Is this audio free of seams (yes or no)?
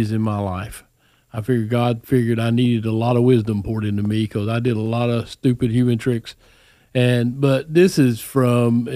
yes